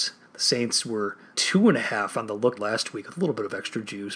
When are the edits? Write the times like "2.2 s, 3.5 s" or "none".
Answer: 1.3 s, 2.5 s